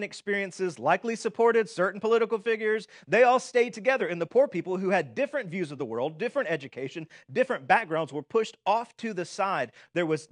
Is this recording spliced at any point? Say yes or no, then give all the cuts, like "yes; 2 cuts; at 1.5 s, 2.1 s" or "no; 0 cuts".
no; 0 cuts